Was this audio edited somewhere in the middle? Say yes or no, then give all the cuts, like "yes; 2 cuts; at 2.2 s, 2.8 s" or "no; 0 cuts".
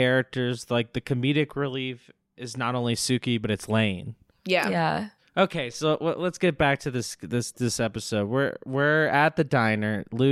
no; 0 cuts